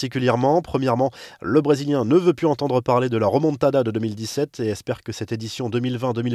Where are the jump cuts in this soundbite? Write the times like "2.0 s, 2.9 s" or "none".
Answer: none